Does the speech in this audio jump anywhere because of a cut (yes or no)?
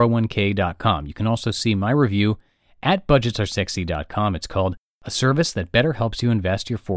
no